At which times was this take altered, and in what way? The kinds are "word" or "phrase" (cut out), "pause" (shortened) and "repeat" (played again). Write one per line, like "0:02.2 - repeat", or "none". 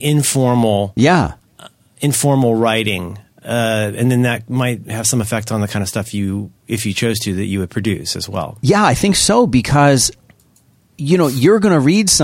none